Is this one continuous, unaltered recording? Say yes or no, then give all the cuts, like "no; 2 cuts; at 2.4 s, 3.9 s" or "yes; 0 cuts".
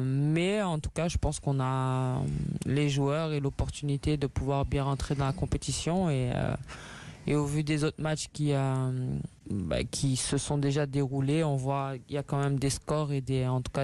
yes; 0 cuts